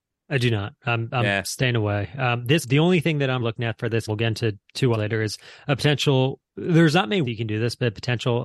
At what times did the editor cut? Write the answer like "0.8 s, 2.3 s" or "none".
2.6 s, 3.4 s, 4.1 s, 4.6 s, 4.9 s, 7.2 s